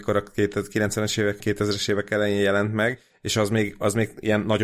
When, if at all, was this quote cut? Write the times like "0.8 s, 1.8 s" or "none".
1.4 s